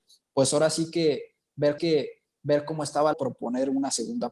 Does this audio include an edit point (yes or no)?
yes